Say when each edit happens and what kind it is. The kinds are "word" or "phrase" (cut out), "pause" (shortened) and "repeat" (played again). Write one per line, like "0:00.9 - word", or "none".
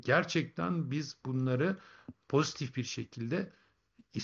none